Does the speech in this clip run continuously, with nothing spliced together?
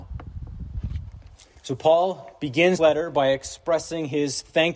no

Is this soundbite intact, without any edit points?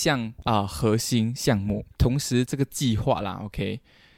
no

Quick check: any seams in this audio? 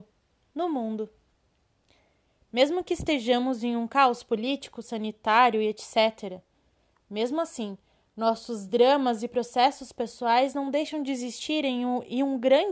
no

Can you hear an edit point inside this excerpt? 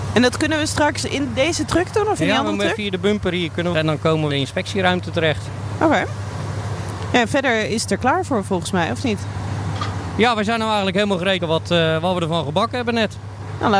yes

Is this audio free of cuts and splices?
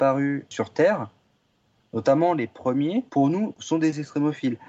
no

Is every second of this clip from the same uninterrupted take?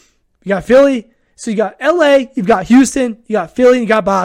yes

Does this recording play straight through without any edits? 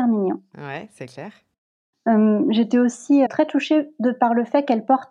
no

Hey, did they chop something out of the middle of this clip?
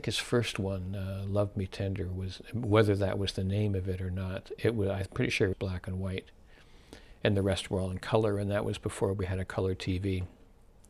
yes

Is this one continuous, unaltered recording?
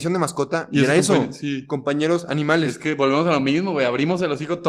yes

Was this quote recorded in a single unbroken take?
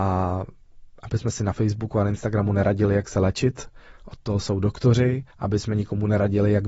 no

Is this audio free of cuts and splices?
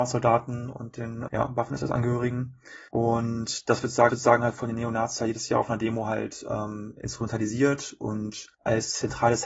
no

